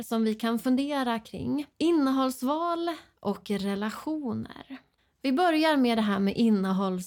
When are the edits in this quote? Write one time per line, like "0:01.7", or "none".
0:01.7
0:05.0

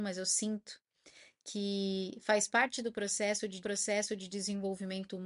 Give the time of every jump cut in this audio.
0:03.6

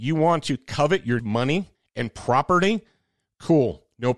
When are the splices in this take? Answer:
0:01.2
0:01.7

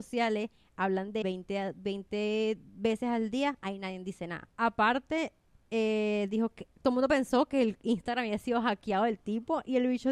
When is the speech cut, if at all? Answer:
0:01.2
0:04.5

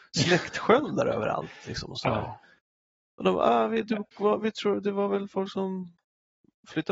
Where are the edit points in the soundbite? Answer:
none

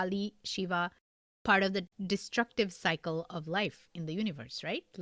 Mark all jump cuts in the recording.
none

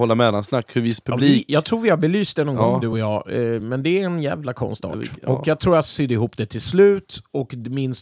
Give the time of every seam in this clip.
none

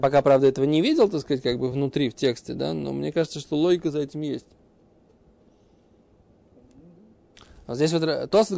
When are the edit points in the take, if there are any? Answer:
none

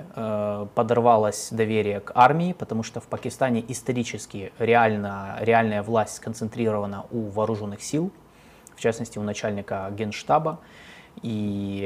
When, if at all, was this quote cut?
none

